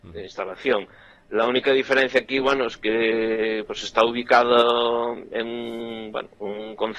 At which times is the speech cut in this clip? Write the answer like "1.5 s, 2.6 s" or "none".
none